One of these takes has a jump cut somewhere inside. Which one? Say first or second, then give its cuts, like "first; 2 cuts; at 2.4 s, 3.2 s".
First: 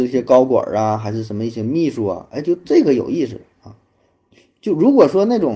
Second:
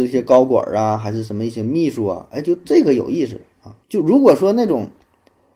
second; 1 cut; at 3.8 s